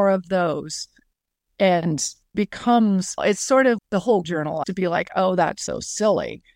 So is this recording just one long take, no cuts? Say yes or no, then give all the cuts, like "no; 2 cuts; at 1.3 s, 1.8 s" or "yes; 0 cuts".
no; 5 cuts; at 2.3 s, 3.2 s, 3.8 s, 4.2 s, 4.6 s